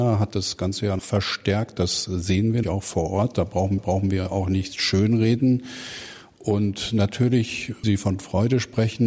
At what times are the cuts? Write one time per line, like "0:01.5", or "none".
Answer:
0:01.0
0:02.6
0:03.8
0:07.8